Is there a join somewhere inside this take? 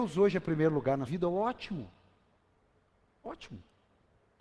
yes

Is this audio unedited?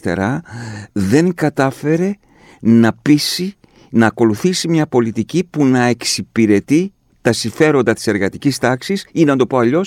yes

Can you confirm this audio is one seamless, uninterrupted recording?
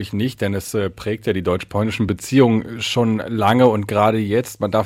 yes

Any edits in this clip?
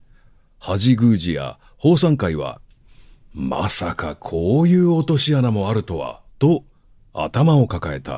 yes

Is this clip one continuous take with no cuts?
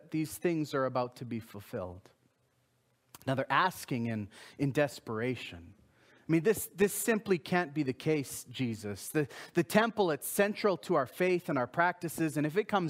yes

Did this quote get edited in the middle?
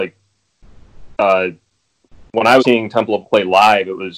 yes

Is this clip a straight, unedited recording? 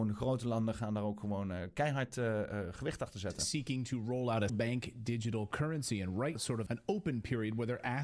no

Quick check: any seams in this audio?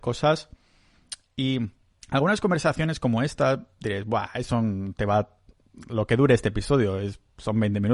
yes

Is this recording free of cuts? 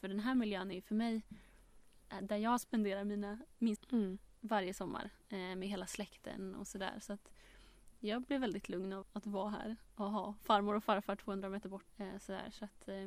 no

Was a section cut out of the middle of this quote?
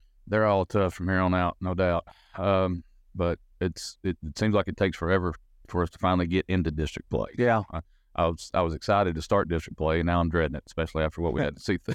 no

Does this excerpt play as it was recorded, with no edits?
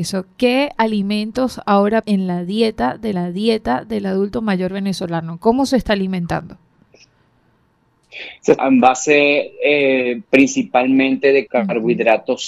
no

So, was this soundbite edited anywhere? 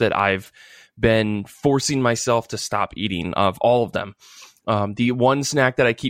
no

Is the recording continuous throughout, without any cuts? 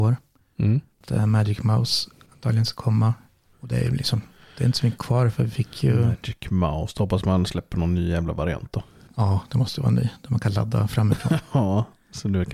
yes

